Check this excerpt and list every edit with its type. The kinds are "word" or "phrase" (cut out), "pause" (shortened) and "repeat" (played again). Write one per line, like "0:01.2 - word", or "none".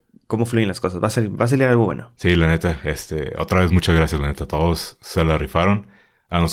none